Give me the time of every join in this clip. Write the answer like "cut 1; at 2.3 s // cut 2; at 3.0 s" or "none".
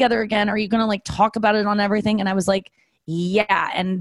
none